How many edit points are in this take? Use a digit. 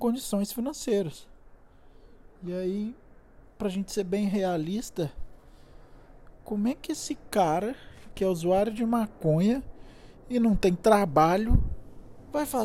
2